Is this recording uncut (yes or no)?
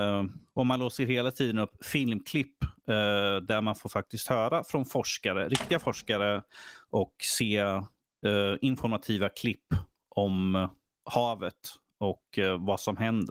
yes